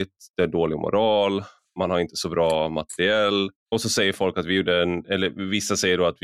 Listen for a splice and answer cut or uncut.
cut